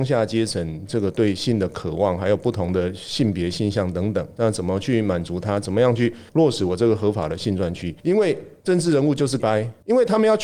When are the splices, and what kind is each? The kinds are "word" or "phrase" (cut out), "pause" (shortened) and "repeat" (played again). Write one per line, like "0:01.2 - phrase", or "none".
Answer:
0:06.3 - pause
0:08.0 - pause
0:09.4 - word